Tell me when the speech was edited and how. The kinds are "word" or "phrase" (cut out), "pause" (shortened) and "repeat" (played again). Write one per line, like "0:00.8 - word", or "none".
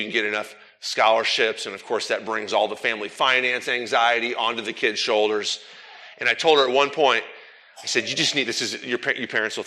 none